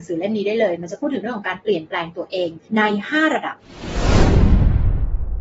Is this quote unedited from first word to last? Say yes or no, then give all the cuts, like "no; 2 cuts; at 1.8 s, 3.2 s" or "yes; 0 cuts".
no; 1 cut; at 2.7 s